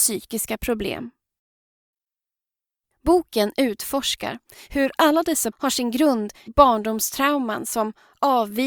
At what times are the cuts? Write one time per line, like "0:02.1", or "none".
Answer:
0:05.5
0:06.5